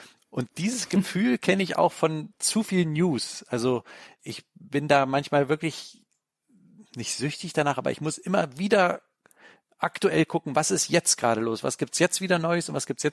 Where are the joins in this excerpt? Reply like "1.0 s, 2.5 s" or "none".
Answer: 4.2 s